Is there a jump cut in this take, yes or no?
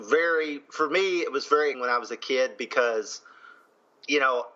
yes